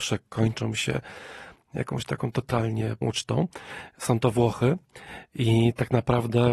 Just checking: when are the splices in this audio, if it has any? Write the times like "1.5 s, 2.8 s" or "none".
3.0 s